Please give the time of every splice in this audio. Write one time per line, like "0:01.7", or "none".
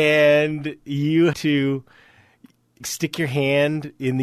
0:01.3
0:02.8